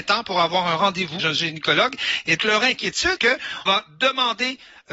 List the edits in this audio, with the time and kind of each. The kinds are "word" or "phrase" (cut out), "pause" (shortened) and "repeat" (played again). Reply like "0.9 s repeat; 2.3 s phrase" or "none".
1.2 s word; 2.4 s word; 3.2 s word; 3.7 s word